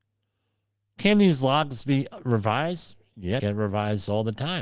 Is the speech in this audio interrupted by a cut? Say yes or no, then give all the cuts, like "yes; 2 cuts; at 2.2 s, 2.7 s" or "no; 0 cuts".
yes; 1 cut; at 3.4 s